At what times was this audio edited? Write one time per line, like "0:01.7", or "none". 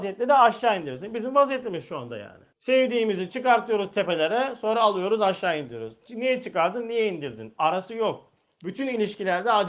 0:02.5
0:08.4